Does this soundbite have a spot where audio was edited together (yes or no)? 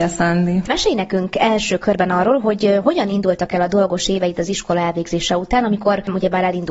no